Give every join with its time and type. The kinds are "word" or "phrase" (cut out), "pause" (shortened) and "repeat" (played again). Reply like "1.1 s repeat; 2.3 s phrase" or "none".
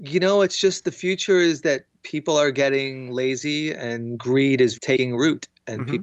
4.7 s word